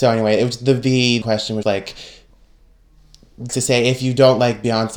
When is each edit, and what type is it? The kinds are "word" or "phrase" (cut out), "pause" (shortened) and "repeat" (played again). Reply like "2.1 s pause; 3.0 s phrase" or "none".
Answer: 1.2 s phrase; 1.6 s word; 3.5 s word